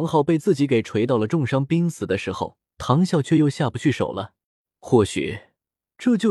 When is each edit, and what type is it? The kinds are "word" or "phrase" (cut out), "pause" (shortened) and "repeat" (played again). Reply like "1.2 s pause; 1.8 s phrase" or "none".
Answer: 2.7 s pause; 4.5 s pause